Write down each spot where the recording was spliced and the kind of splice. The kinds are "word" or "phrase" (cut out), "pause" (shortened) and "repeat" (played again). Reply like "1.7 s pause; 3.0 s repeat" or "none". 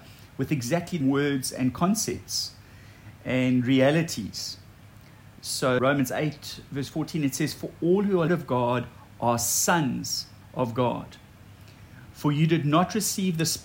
1.0 s word; 5.8 s word; 8.3 s phrase